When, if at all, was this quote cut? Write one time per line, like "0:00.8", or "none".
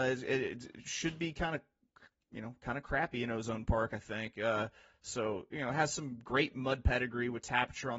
none